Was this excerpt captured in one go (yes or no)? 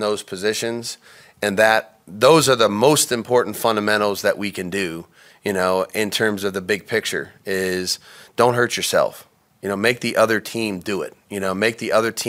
yes